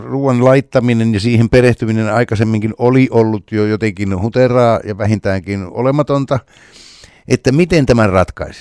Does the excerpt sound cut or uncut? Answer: uncut